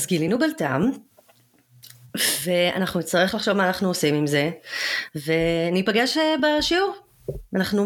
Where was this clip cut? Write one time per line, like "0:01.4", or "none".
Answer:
none